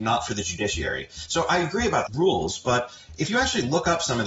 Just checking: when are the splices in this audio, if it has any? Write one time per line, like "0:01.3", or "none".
0:02.1